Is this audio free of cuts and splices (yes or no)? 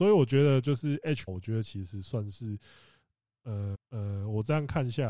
no